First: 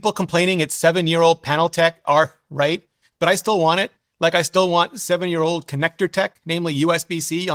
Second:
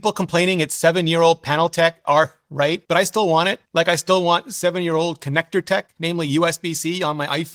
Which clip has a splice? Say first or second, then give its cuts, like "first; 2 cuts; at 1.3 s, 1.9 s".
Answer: second; 2 cuts; at 2.8 s, 3.7 s